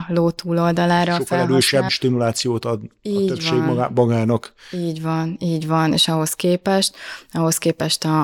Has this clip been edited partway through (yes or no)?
yes